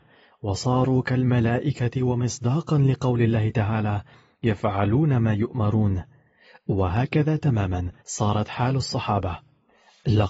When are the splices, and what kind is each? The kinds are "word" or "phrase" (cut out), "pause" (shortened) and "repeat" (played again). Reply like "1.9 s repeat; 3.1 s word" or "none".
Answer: 8.0 s pause